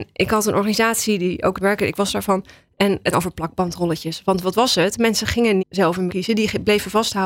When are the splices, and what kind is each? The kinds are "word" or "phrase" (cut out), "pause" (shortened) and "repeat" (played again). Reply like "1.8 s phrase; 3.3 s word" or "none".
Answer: 1.6 s word; 3.1 s word; 5.6 s word; 6.1 s word